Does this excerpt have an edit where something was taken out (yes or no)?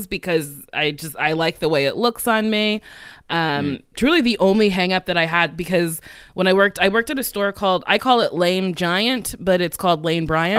no